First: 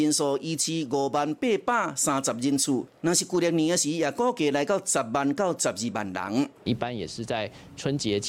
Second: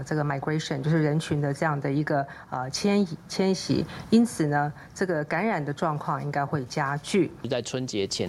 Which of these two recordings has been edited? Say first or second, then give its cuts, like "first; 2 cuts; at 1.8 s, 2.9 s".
first; 1 cut; at 6.6 s